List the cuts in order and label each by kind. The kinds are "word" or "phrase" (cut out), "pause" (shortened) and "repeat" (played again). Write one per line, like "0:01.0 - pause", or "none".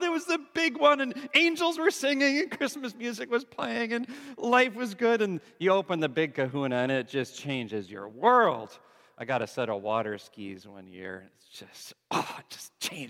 none